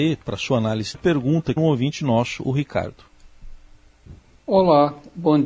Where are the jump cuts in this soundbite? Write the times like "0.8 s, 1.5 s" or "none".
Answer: 0.9 s, 1.6 s, 4.2 s